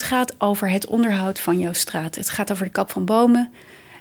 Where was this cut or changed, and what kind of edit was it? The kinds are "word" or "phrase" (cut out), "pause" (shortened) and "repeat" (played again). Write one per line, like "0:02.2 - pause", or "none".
none